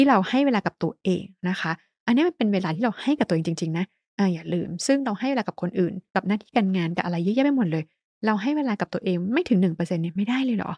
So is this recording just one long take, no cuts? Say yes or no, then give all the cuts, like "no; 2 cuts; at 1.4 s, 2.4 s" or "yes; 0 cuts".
yes; 0 cuts